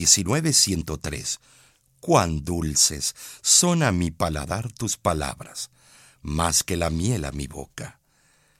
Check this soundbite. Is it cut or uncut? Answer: uncut